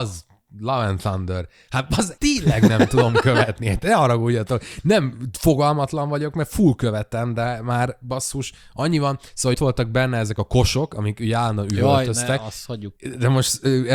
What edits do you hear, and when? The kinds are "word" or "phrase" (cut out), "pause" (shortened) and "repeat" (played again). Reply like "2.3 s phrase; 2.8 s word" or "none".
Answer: 2.2 s word; 9.5 s word; 13.0 s pause